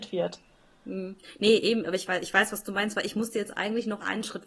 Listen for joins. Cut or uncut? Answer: uncut